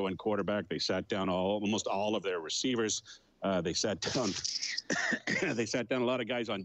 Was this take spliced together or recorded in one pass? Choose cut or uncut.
uncut